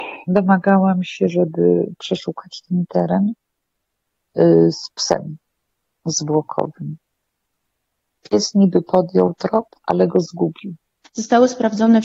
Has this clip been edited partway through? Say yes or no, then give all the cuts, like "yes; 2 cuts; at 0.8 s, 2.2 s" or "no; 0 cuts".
no; 0 cuts